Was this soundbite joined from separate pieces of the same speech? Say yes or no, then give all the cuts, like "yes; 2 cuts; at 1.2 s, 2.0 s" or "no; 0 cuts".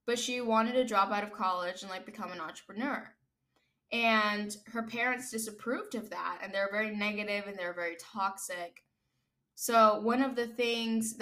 no; 0 cuts